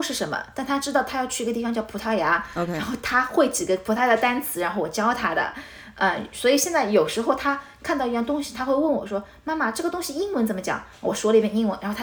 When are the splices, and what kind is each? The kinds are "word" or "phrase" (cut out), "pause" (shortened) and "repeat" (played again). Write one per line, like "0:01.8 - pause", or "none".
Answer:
none